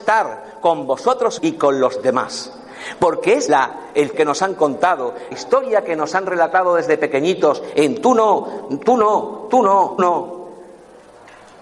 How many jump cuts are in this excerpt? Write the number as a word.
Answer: five